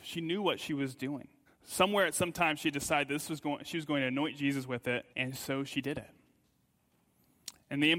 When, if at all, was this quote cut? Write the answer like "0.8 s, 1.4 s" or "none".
1.5 s, 5.1 s